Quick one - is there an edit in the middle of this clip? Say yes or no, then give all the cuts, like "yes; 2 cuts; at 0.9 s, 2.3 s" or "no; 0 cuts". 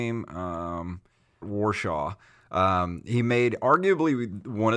yes; 1 cut; at 1.4 s